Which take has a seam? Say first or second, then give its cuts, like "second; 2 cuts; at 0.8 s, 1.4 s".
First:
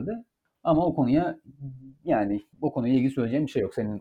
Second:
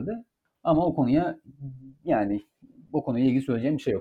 first; 1 cut; at 2.5 s